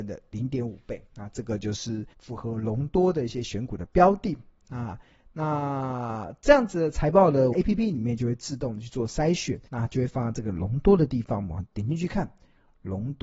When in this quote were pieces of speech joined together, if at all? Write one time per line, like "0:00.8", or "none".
0:01.1
0:02.1
0:07.5
0:09.7